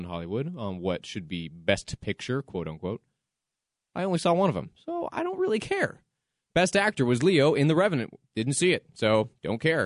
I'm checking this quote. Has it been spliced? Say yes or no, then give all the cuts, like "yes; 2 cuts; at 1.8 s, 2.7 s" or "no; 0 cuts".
no; 0 cuts